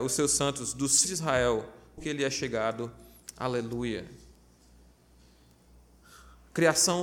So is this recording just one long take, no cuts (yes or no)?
no